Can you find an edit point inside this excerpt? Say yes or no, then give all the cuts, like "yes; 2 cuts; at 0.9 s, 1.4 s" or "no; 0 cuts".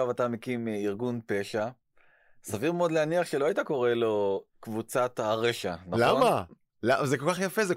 no; 0 cuts